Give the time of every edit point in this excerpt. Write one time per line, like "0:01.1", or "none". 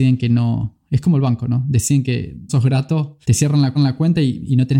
0:02.5
0:03.2
0:03.8